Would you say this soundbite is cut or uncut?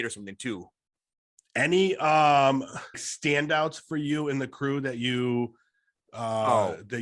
cut